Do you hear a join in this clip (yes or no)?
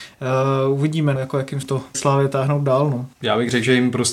yes